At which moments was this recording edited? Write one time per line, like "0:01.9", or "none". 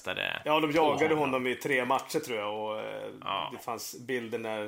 none